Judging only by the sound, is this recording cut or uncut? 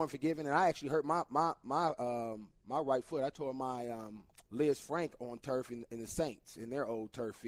cut